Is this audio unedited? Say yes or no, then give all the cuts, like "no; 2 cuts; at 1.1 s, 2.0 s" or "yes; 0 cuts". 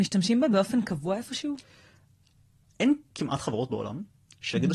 yes; 0 cuts